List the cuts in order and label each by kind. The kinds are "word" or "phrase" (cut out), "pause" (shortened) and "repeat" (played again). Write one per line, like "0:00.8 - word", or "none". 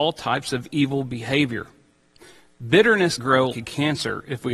0:03.2 - word
0:03.5 - word